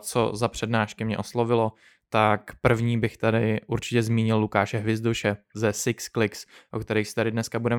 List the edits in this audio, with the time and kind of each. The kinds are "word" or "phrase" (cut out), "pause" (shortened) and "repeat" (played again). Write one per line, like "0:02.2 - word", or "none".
none